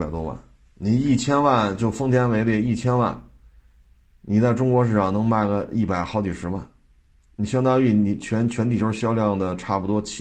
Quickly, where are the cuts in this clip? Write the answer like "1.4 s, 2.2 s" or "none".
none